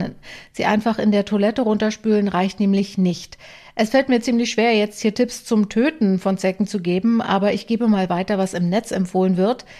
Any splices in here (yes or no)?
no